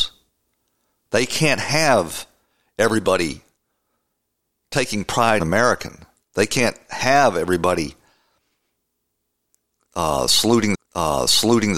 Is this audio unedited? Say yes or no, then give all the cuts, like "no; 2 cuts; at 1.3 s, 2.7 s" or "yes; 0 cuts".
no; 2 cuts; at 5.4 s, 10.7 s